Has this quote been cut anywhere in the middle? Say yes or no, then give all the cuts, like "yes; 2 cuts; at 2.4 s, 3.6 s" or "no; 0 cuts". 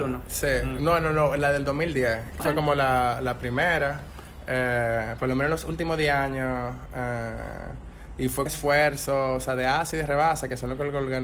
yes; 2 cuts; at 2.4 s, 8.5 s